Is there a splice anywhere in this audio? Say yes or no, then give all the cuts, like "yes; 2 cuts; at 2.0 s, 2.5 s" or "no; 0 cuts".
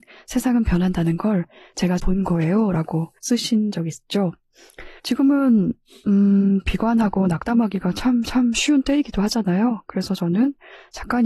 yes; 4 cuts; at 2.0 s, 3.2 s, 5.0 s, 8.2 s